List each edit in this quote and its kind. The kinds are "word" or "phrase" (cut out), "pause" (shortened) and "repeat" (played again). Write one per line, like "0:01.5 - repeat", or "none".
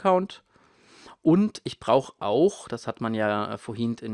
none